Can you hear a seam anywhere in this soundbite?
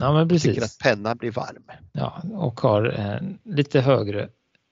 no; 0 cuts

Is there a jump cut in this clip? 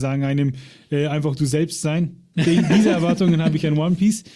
no; 0 cuts

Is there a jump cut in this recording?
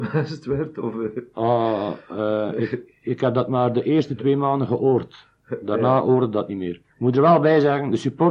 yes; 1 cut; at 6.9 s

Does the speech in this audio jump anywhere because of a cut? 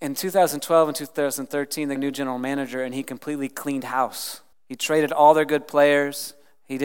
yes; 2 cuts; at 2.0 s, 4.5 s

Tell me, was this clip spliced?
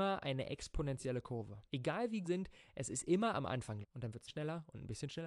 yes; 4 cuts; at 1.7 s, 2.2 s, 3.8 s, 4.3 s

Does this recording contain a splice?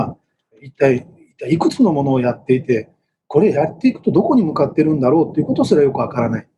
no; 0 cuts

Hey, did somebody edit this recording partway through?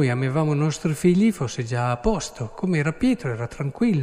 no; 0 cuts

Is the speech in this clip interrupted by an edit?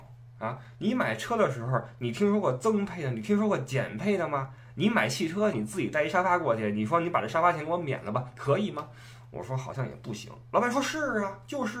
yes; 1 cut; at 5.5 s

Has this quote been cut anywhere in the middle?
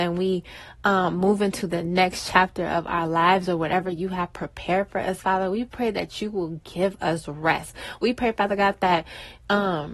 no; 0 cuts

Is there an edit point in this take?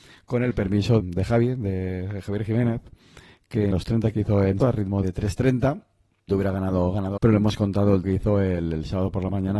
yes; 8 cuts; at 1.0 s, 3.7 s, 4.1 s, 4.6 s, 5.0 s, 6.3 s, 7.2 s, 8.0 s

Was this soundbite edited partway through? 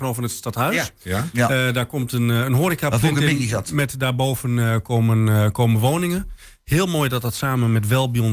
no; 0 cuts

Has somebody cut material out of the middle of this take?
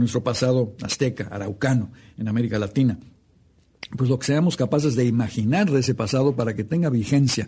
no; 0 cuts

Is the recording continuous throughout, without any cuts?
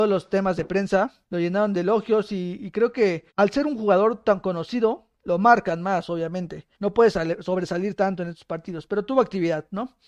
no; 4 cuts; at 1.2 s, 3.3 s, 5.2 s, 6.7 s

